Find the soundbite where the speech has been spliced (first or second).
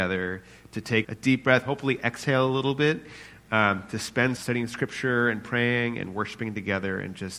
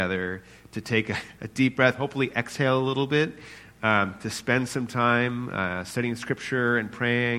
first